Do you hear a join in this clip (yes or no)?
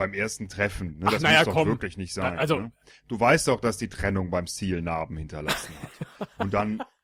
no